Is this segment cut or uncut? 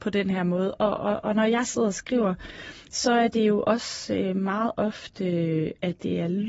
uncut